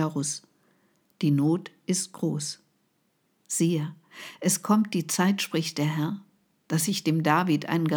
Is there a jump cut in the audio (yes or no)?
no